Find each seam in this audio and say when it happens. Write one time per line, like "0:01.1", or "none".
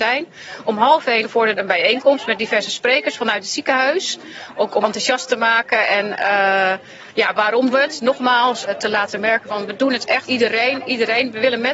0:01.2
0:01.6
0:04.8
0:07.7
0:08.7
0:10.3